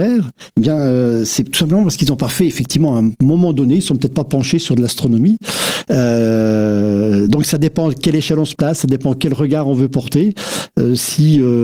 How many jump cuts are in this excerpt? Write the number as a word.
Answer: zero